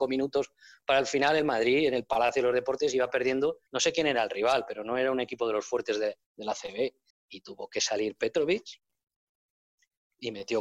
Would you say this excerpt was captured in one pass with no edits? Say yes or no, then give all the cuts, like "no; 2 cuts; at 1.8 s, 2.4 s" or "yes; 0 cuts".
no; 3 cuts; at 3.7 s, 6.2 s, 7.1 s